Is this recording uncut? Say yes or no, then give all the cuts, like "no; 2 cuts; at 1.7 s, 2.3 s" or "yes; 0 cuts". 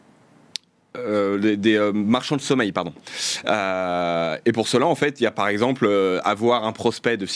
yes; 0 cuts